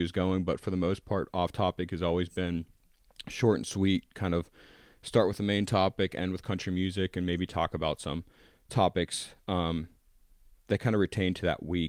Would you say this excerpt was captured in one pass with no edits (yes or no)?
yes